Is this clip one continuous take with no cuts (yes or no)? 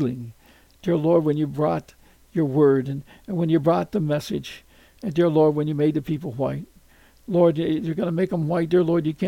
yes